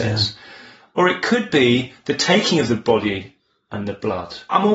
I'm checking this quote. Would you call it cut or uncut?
uncut